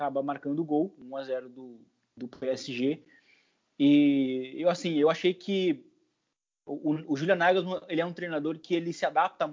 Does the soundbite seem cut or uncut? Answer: uncut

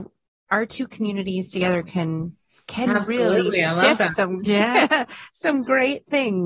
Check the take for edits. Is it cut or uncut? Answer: uncut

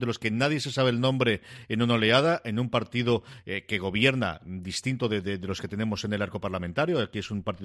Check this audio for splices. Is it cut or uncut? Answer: uncut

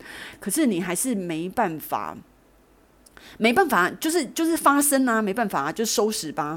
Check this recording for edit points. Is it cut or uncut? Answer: uncut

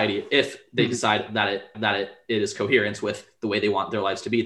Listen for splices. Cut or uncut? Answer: cut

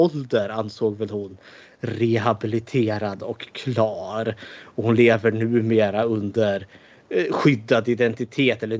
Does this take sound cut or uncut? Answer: uncut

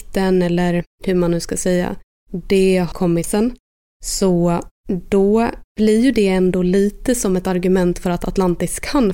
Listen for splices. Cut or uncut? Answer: cut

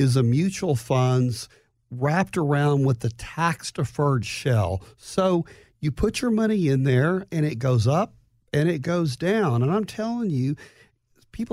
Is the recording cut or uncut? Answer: uncut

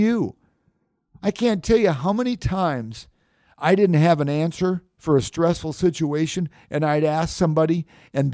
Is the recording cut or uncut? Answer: uncut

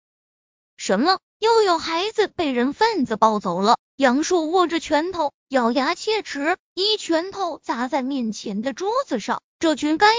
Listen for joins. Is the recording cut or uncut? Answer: cut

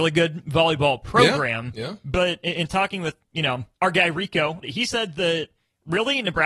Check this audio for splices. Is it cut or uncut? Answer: cut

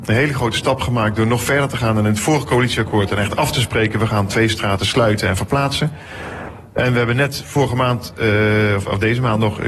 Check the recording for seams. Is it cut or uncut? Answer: uncut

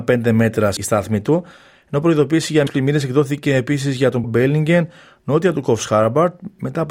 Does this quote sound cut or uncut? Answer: cut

